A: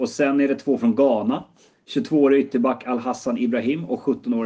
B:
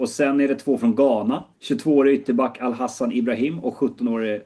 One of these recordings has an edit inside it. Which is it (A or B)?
B